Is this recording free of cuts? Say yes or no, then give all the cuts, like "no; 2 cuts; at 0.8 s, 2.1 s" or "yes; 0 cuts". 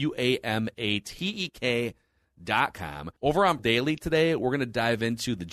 no; 2 cuts; at 3.2 s, 3.6 s